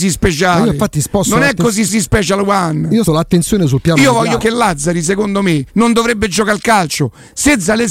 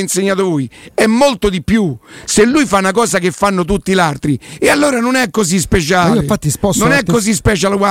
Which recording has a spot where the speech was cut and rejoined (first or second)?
first